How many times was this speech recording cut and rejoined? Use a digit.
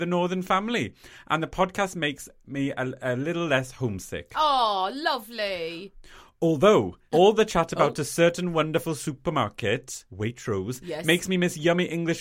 0